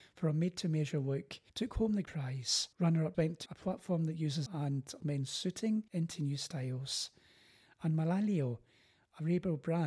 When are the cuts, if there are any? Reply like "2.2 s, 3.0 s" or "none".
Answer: 1.5 s, 2.0 s, 2.7 s, 3.1 s, 3.5 s, 4.5 s, 5.0 s, 5.9 s